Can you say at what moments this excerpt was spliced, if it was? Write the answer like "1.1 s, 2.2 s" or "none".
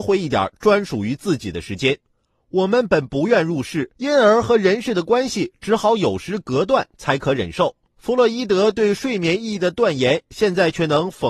none